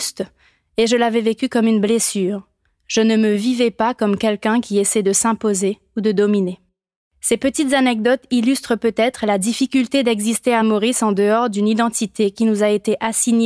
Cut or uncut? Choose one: uncut